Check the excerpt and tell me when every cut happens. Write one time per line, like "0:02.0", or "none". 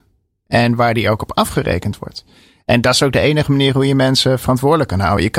none